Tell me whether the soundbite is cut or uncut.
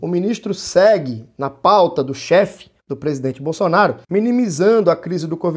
cut